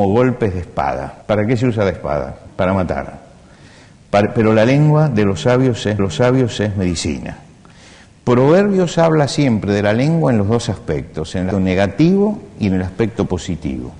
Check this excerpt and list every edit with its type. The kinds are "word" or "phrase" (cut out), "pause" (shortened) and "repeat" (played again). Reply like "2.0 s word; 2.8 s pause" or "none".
1.2 s pause; 2.5 s pause; 6.0 s repeat; 11.5 s word